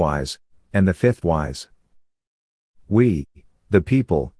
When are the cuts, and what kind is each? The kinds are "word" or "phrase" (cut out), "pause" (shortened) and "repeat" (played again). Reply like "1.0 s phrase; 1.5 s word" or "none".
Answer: 1.2 s phrase